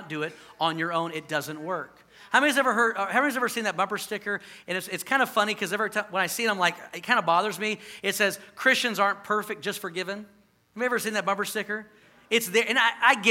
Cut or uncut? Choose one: uncut